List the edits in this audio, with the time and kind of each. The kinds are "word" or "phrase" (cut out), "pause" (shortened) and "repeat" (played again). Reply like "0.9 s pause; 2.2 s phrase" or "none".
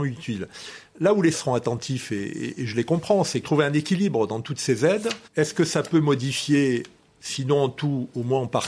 1.3 s word; 3.4 s phrase; 5.3 s pause

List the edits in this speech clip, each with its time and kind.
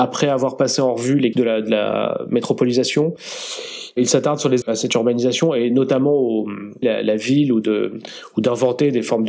1.3 s word; 4.6 s word; 6.8 s phrase

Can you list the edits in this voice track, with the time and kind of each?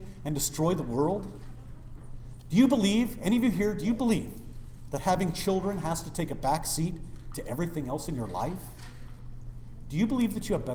none

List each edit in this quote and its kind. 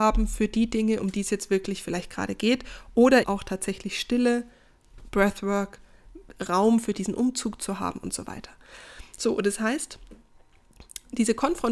3.2 s word

